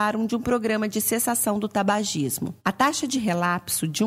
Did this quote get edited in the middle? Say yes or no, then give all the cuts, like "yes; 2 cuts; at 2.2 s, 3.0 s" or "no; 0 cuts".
yes; 1 cut; at 2.6 s